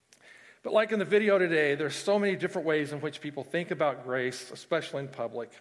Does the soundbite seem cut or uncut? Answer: uncut